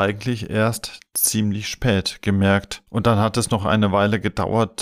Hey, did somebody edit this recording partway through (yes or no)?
yes